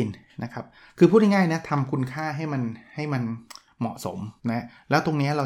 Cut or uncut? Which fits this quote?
cut